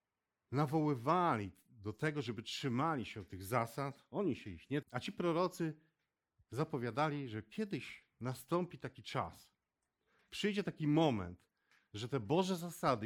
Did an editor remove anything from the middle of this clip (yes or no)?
yes